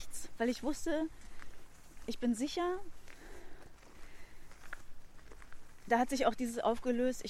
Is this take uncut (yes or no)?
yes